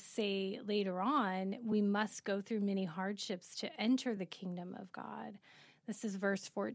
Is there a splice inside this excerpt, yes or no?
no